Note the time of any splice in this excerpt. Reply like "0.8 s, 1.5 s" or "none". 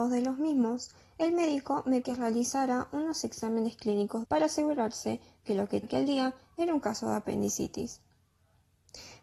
2.0 s, 4.2 s, 5.8 s